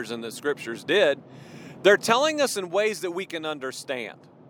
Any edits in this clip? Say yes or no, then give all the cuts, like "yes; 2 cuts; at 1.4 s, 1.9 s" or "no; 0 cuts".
no; 0 cuts